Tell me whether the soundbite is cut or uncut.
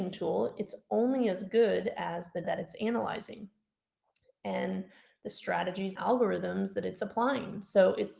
cut